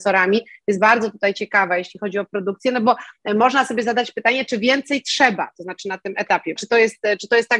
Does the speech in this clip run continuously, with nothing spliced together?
no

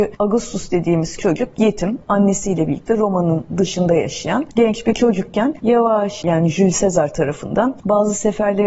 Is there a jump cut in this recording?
yes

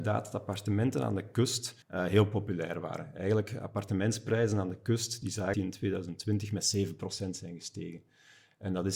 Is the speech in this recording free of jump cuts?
no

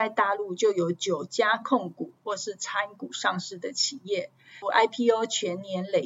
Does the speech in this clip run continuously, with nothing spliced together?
no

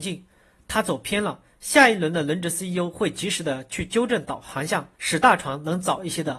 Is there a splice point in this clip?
yes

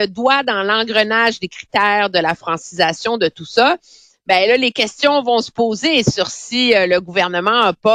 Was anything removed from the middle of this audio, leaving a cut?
no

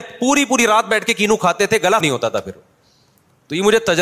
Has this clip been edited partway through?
yes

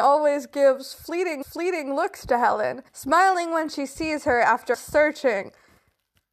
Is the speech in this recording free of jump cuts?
no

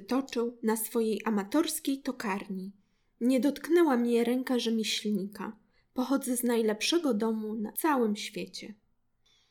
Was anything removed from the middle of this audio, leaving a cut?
no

